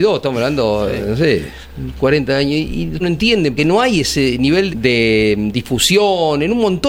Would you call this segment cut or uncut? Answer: cut